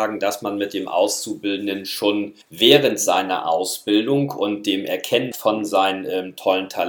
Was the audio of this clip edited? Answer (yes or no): yes